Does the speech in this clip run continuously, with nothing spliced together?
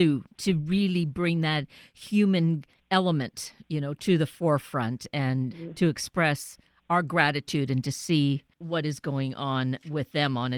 yes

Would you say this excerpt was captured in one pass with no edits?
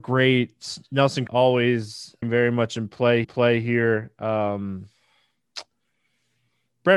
no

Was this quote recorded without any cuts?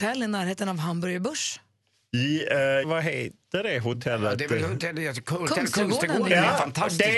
no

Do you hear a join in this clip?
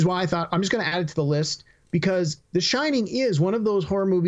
no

